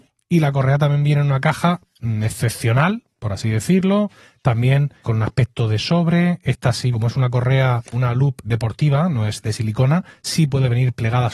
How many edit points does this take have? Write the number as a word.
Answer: four